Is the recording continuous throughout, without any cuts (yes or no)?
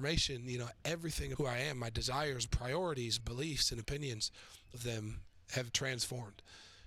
no